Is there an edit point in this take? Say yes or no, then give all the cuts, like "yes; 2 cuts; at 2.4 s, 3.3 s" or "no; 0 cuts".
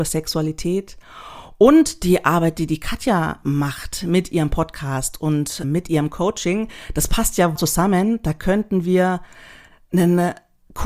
yes; 3 cuts; at 3.4 s, 5.6 s, 7.6 s